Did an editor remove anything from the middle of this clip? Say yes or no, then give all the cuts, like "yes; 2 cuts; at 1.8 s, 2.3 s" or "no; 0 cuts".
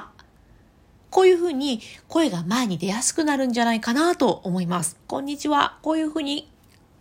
yes; 1 cut; at 5.0 s